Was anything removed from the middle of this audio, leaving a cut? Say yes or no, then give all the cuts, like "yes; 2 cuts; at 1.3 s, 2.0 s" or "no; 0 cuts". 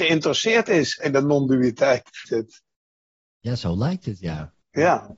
yes; 2 cuts; at 1.0 s, 2.2 s